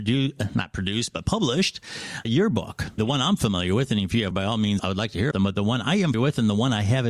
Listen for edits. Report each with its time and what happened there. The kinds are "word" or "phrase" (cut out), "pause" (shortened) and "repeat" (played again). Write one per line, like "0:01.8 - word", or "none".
0:02.2 - word
0:03.0 - word
0:04.3 - word
0:04.8 - word
0:05.3 - word
0:06.1 - word